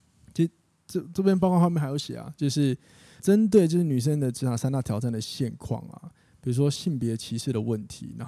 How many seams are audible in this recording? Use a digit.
1